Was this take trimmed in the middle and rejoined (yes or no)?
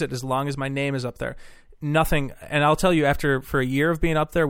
no